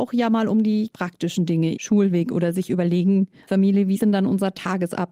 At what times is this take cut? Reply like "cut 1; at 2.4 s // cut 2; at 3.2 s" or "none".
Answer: cut 1; at 0.9 s // cut 2; at 1.7 s // cut 3; at 3.5 s // cut 4; at 4.0 s